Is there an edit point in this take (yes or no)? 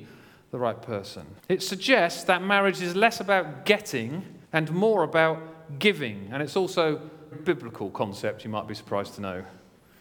yes